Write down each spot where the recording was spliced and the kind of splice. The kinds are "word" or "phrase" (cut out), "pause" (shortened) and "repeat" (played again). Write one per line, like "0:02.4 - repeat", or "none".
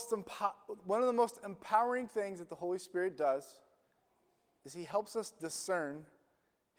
none